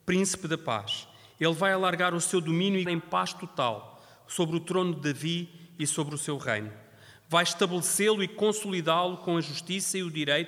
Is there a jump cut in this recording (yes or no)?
yes